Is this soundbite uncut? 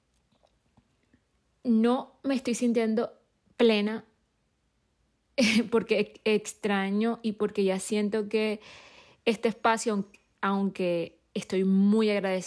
yes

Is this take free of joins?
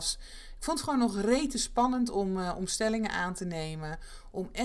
yes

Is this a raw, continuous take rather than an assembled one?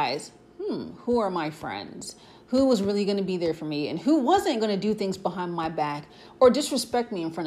yes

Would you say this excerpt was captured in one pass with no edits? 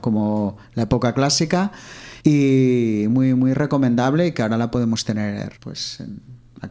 no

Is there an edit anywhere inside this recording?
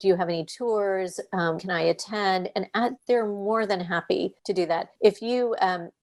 yes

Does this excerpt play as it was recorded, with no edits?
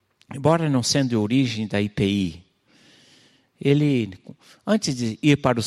yes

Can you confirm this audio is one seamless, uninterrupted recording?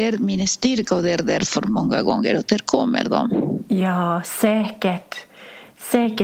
yes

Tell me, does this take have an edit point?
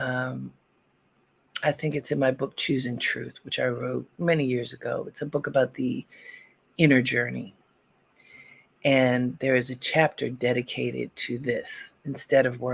no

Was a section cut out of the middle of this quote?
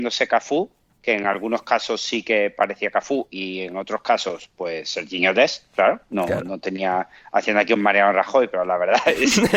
no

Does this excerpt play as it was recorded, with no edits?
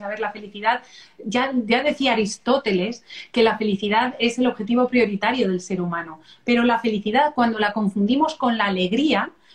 yes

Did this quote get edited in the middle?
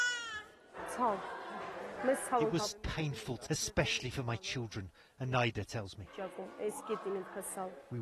yes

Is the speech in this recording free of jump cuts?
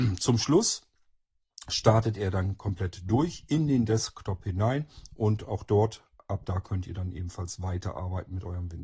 yes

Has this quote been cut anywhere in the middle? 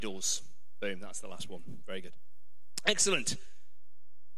no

